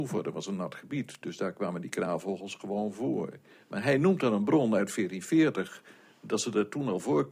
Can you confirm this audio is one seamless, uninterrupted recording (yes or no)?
yes